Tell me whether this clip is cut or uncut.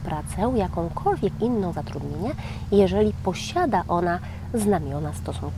cut